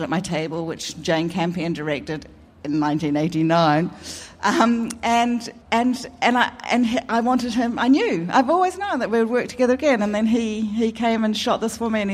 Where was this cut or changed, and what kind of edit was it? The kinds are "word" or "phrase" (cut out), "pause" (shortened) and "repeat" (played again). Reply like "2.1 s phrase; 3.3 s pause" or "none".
5.6 s pause